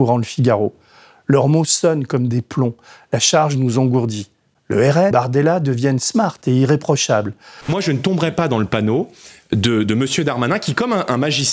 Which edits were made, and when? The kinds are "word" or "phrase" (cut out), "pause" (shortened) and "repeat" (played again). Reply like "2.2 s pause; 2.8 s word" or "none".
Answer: 5.1 s word; 9.8 s word